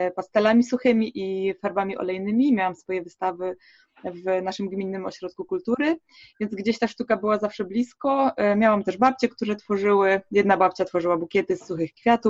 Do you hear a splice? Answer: no; 0 cuts

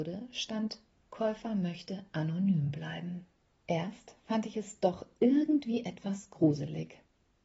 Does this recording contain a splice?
no; 0 cuts

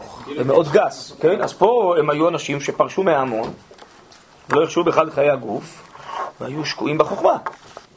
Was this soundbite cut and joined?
no; 0 cuts

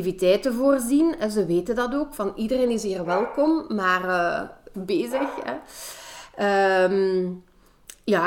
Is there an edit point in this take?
yes; 1 cut; at 4.7 s

